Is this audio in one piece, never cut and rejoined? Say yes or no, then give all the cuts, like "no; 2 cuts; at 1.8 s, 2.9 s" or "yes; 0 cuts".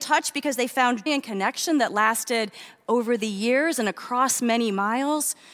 no; 1 cut; at 1.1 s